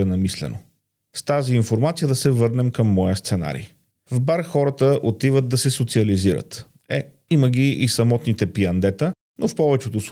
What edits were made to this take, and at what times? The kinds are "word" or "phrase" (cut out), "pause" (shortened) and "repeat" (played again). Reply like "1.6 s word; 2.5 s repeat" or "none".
none